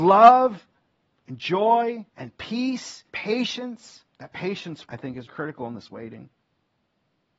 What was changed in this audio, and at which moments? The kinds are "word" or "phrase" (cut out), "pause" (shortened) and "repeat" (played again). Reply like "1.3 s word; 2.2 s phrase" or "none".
1.0 s pause; 2.1 s pause; 3.1 s word; 4.1 s pause; 4.9 s word; 5.3 s word